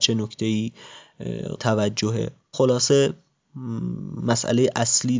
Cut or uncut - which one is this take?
cut